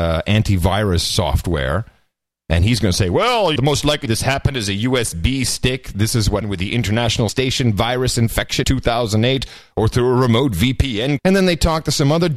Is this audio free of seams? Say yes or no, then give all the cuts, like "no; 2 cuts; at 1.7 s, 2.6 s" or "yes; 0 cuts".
no; 6 cuts; at 3.6 s, 4.1 s, 6.4 s, 7.3 s, 8.6 s, 11.2 s